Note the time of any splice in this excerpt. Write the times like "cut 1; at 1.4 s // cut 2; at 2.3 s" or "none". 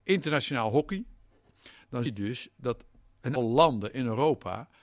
cut 1; at 2.1 s // cut 2; at 3.4 s